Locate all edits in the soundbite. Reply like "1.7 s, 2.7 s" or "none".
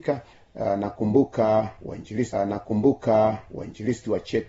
2.3 s